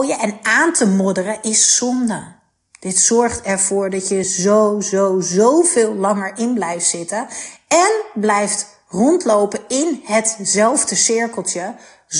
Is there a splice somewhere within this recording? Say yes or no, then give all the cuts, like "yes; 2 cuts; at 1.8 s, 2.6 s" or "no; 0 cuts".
no; 0 cuts